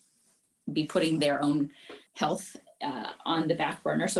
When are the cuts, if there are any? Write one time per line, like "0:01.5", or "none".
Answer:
0:02.1